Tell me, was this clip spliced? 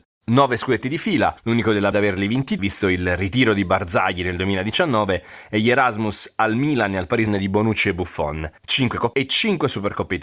yes; 6 cuts; at 1.4 s, 1.9 s, 2.6 s, 7.3 s, 8.6 s, 9.1 s

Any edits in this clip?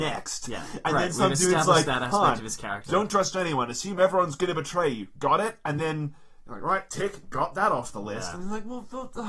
no; 0 cuts

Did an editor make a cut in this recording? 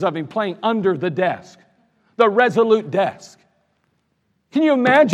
no; 0 cuts

